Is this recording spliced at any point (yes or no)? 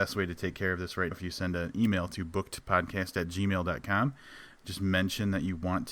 yes